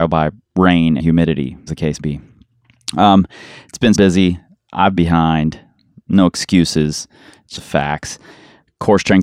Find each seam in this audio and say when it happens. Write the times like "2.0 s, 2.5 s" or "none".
1.0 s, 1.7 s, 2.0 s, 3.9 s, 5.0 s, 7.6 s